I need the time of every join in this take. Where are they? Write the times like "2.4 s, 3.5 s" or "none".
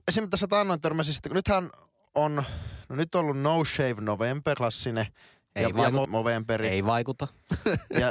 4.5 s, 6.0 s